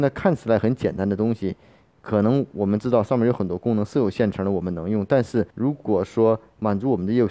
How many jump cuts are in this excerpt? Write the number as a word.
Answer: one